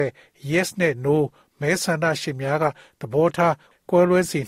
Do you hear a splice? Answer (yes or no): no